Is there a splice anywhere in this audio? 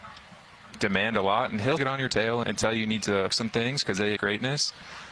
yes; 4 cuts; at 1.8 s, 2.4 s, 3.3 s, 4.2 s

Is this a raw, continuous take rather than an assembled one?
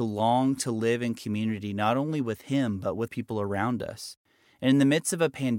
no; 1 cut; at 3.1 s

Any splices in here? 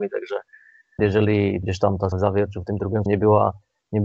yes; 4 cuts; at 1.0 s, 1.6 s, 2.1 s, 3.1 s

